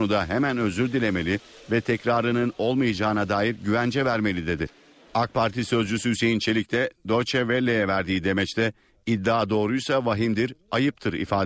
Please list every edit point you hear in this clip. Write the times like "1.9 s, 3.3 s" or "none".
none